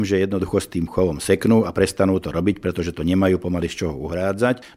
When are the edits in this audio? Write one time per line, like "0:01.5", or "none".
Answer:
none

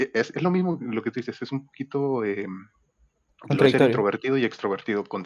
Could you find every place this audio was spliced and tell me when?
none

